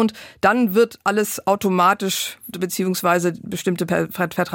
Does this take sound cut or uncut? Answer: cut